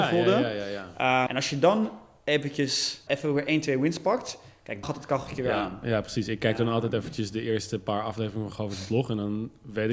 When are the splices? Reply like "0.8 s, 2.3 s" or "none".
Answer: 1.3 s, 3.1 s, 4.8 s